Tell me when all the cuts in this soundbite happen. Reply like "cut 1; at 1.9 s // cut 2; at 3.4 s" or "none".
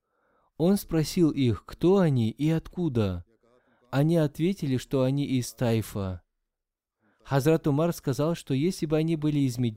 none